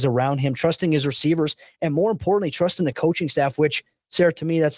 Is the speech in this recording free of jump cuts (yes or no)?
yes